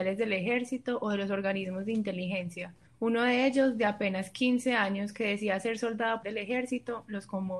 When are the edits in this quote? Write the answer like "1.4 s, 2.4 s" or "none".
2.9 s, 6.2 s